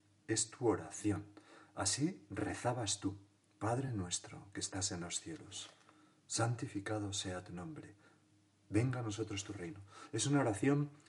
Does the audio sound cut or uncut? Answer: uncut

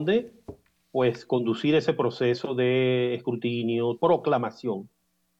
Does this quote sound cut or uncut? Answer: cut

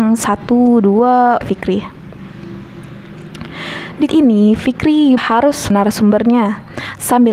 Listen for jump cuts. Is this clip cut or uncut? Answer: cut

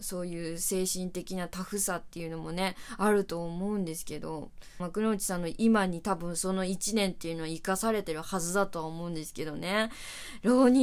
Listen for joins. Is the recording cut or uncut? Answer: cut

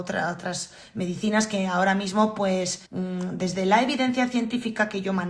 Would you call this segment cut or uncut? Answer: cut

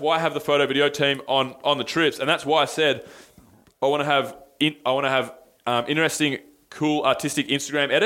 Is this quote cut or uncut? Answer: uncut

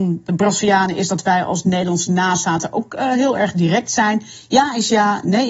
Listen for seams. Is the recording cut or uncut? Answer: uncut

